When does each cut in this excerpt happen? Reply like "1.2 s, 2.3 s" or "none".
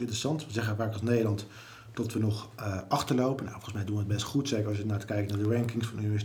none